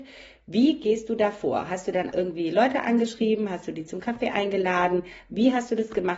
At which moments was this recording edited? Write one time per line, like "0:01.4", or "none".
0:02.1

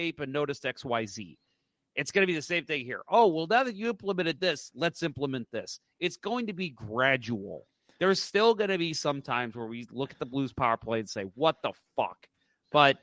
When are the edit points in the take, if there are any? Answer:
none

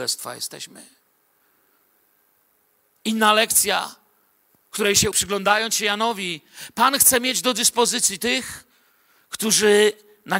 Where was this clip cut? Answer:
0:05.1

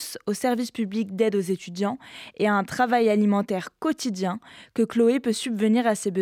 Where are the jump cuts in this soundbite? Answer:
none

